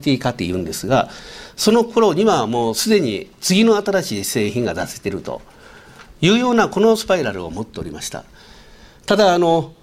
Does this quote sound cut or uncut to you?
uncut